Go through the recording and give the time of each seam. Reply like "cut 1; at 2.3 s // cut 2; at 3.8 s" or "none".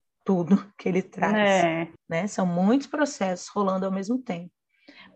cut 1; at 2.0 s